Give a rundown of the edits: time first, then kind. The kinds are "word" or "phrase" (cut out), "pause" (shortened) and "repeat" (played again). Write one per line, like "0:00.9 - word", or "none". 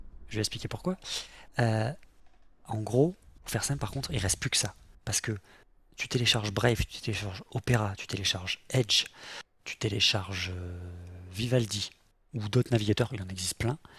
none